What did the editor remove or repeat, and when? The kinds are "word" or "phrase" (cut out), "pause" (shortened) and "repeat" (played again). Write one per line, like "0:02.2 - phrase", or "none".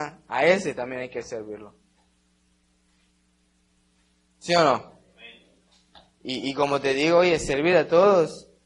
none